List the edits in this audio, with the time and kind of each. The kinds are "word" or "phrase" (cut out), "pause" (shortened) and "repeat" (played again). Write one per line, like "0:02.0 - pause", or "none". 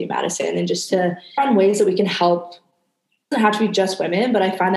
0:01.4 - word
0:03.3 - word

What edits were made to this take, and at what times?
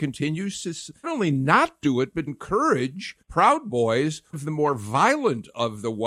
0:01.0 - word
0:02.3 - word
0:03.2 - word
0:04.3 - word

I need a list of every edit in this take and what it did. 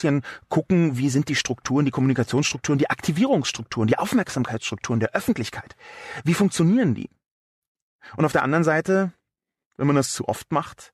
none

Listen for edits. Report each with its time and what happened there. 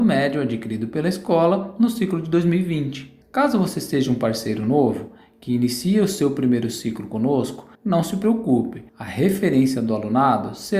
0:03.2 - pause
0:07.7 - pause
0:08.9 - pause

